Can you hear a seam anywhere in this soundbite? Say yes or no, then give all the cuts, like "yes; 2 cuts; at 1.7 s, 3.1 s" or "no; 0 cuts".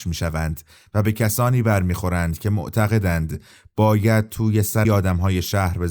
yes; 1 cut; at 4.8 s